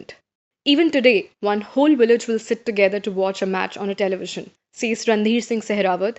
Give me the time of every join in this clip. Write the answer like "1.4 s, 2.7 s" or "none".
4.6 s